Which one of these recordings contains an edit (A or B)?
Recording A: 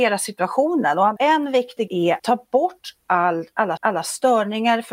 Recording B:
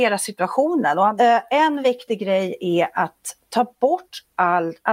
A